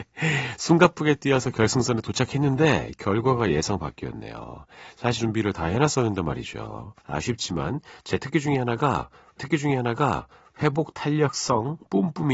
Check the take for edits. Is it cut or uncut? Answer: cut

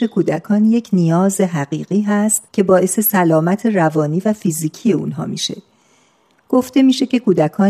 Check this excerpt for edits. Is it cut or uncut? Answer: cut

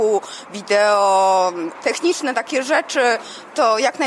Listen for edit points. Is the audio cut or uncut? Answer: cut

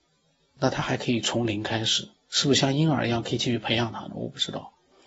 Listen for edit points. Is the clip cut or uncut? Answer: cut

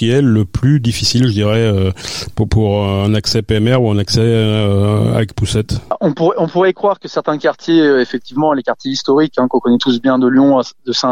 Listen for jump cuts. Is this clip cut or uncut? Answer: uncut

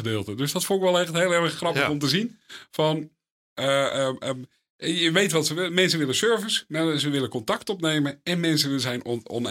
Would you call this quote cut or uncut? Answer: uncut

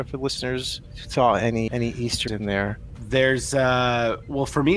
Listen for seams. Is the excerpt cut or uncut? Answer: cut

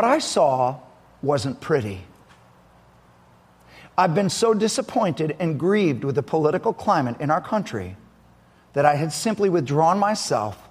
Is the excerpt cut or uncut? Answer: uncut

